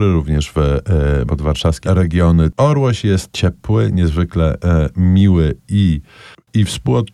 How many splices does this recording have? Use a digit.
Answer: 3